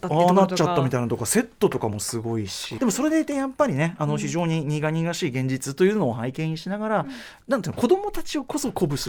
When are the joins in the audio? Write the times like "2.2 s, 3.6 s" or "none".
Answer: 2.8 s